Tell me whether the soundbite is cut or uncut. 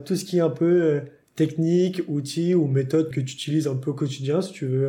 cut